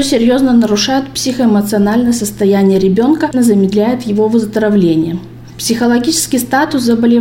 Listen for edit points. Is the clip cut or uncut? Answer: cut